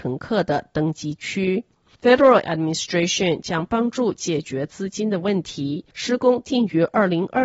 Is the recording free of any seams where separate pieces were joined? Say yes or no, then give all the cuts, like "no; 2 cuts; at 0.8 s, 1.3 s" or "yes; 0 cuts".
no; 2 cuts; at 2.4 s, 5.9 s